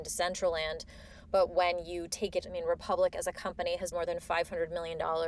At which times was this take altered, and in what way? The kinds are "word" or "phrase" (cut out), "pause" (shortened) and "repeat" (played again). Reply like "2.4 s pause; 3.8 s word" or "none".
2.4 s phrase; 3.9 s word